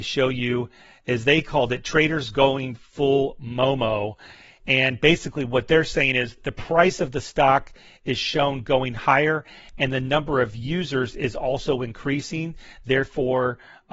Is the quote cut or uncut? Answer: cut